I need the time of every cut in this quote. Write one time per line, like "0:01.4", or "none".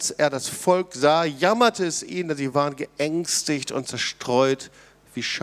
none